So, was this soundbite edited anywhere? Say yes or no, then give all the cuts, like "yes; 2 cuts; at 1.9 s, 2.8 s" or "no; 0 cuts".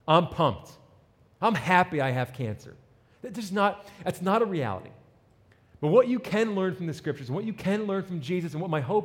no; 0 cuts